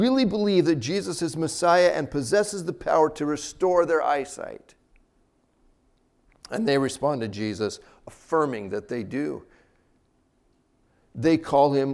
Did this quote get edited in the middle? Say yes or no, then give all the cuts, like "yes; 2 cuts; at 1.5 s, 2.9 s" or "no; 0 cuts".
no; 0 cuts